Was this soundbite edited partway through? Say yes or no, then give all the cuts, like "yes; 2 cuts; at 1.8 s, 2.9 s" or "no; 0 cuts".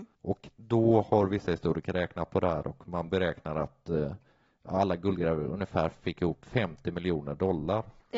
no; 0 cuts